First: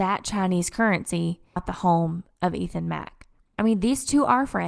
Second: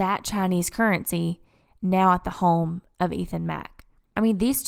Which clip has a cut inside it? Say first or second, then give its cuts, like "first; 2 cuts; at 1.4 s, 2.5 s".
first; 1 cut; at 1.6 s